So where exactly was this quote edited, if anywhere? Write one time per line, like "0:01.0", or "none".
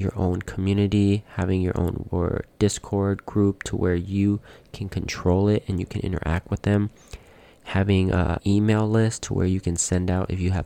0:02.1
0:08.4

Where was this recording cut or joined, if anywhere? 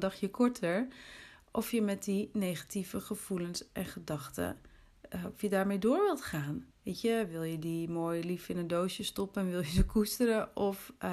0:06.7

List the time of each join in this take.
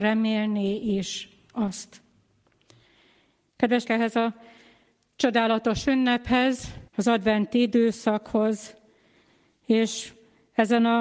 0:03.9
0:06.9

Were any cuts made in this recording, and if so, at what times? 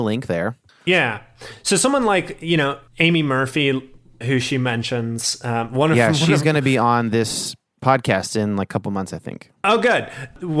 0:02.9
0:04.2

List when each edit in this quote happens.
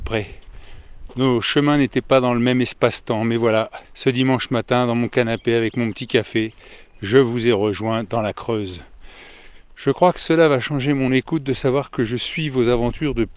0:03.8

